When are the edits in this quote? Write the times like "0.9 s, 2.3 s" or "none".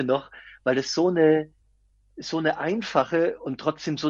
none